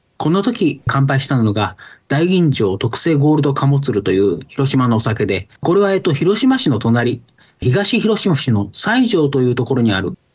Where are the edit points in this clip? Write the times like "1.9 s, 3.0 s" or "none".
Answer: 5.6 s